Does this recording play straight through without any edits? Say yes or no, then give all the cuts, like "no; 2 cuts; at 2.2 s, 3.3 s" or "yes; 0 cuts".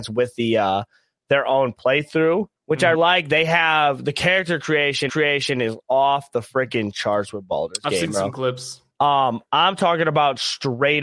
no; 4 cuts; at 2.6 s, 2.9 s, 5.1 s, 8.9 s